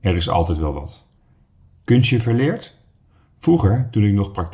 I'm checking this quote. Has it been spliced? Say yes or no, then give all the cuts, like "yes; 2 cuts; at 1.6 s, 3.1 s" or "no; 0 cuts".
no; 0 cuts